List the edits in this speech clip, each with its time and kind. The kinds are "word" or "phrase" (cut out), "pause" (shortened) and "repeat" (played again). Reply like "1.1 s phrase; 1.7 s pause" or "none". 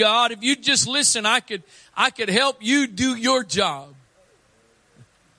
none